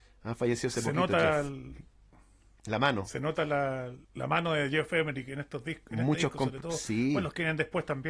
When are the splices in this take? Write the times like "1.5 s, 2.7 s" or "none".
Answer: 4.0 s

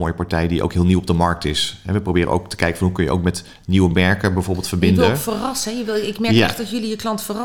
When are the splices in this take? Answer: none

